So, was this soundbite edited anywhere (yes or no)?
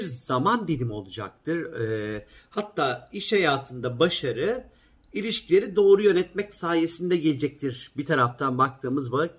no